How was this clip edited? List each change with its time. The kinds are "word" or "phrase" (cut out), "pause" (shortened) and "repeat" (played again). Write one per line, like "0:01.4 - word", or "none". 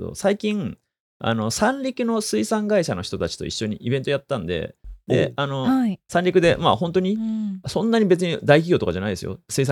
none